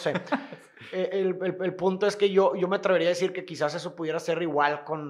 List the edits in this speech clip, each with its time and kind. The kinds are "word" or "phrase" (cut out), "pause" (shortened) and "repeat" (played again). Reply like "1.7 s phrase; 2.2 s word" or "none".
1.6 s repeat